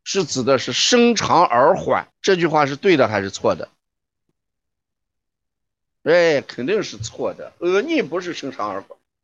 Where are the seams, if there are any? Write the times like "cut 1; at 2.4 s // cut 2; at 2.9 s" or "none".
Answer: cut 1; at 2.1 s